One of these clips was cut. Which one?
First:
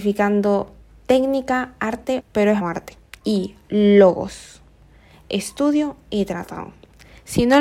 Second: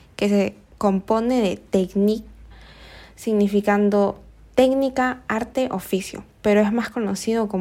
first; 3 cuts; at 2.2 s, 2.6 s, 3.2 s

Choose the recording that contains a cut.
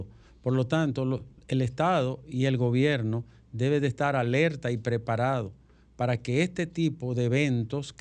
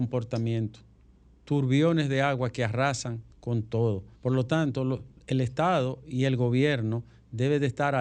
second; 2 cuts; at 3.3 s, 4.1 s

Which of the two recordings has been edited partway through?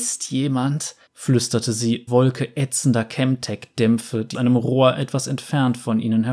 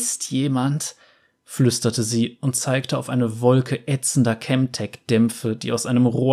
first; 3 cuts; at 1.1 s, 2.1 s, 4.3 s

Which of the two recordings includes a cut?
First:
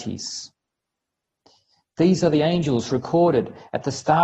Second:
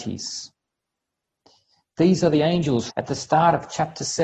second; 1 cut; at 2.9 s

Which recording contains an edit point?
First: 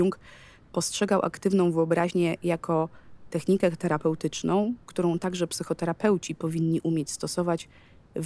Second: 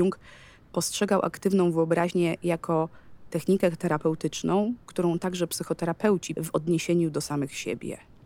second; 1 cut; at 6.4 s

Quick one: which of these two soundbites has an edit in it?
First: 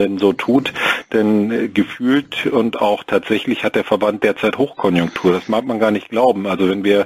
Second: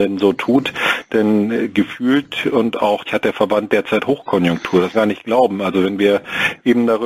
second; 2 cuts; at 3.1 s, 4.9 s

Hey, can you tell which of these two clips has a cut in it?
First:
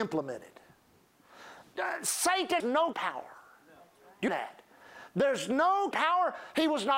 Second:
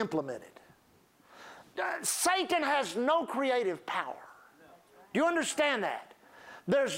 first; 4 cuts; at 2.6 s, 2.9 s, 4.3 s, 5.9 s

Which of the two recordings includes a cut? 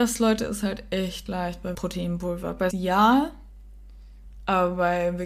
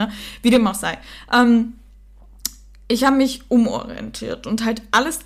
first; 3 cuts; at 1.3 s, 1.7 s, 2.7 s

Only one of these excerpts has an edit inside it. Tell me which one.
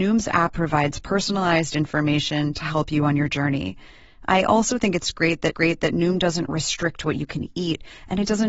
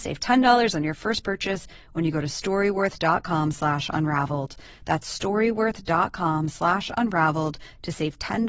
first; 1 cut; at 5.5 s

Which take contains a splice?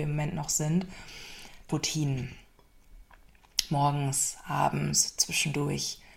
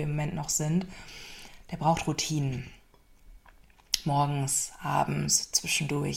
first; 1 cut; at 1.7 s

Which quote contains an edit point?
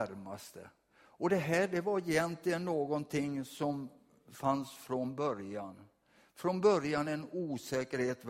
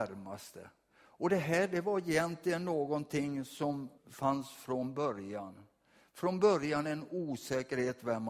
second; 1 cut; at 4.0 s

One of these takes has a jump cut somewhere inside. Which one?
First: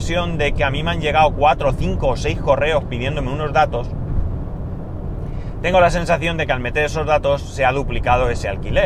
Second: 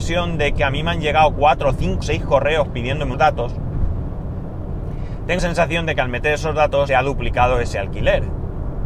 second; 4 cuts; at 2.0 s, 3.1 s, 5.4 s, 6.9 s

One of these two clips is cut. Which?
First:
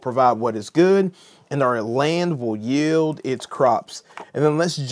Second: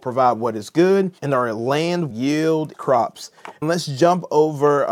second; 4 cuts; at 1.2 s, 2.1 s, 2.7 s, 3.6 s

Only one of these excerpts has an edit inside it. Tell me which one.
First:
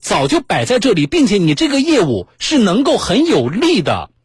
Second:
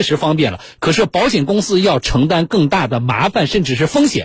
first; 1 cut; at 2.3 s

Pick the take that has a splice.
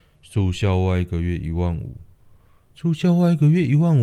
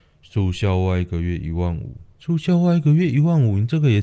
second; 1 cut; at 2.1 s

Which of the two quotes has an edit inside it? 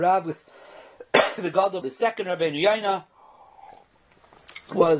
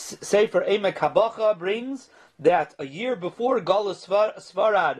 first; 1 cut; at 1.8 s

